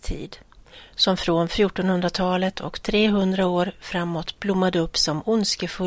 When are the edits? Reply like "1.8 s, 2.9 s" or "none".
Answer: none